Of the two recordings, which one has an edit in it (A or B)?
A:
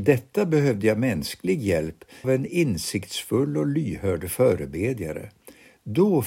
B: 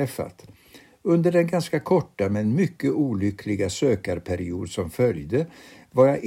A